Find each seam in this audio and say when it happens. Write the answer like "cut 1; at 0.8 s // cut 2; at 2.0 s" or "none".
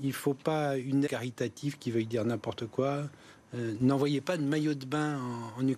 cut 1; at 1.1 s